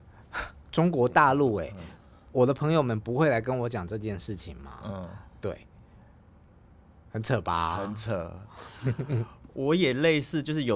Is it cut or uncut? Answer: uncut